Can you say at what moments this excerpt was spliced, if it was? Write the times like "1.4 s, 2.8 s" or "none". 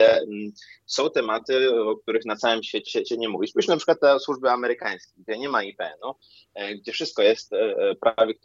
2.9 s